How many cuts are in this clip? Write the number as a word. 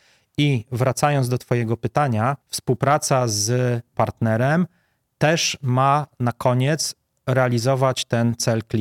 one